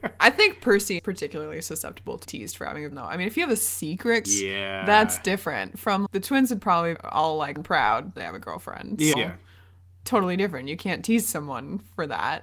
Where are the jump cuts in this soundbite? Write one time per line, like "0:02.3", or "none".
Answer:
0:01.0
0:02.2
0:02.9
0:04.2
0:06.1
0:06.9
0:07.6
0:08.2
0:09.1